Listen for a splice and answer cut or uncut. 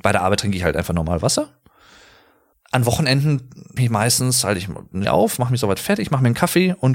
cut